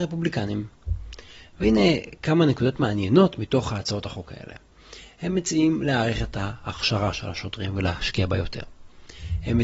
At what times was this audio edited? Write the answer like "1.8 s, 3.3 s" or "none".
none